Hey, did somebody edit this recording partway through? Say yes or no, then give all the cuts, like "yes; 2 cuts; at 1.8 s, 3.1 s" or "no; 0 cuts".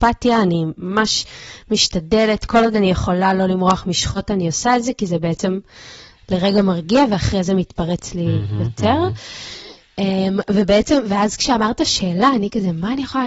no; 0 cuts